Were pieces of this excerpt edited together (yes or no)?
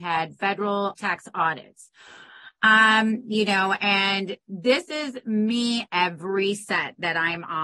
yes